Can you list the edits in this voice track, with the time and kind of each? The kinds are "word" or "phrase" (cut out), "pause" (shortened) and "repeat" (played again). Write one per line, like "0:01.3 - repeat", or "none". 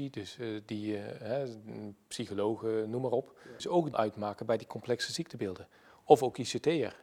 0:03.6 - phrase
0:03.9 - word

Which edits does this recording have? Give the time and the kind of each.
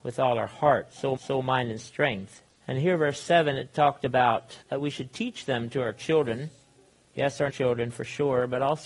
0:01.2 - repeat
0:02.5 - pause
0:04.6 - pause
0:06.9 - pause
0:07.5 - word

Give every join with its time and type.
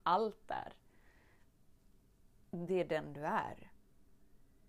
none

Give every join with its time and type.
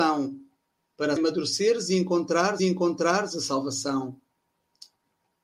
0:01.2 - word
0:02.6 - repeat

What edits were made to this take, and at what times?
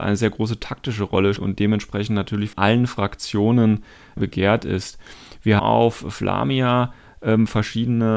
0:01.4 - word
0:02.5 - word
0:04.2 - word
0:05.6 - word

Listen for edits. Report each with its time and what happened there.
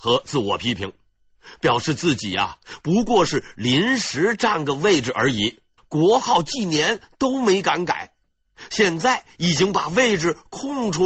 0:05.8 - pause

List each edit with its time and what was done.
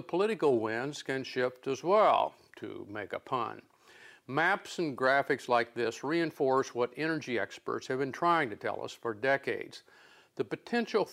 none

